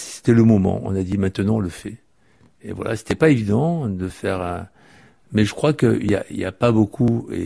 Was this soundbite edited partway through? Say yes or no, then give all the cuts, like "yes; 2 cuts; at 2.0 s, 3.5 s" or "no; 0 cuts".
no; 0 cuts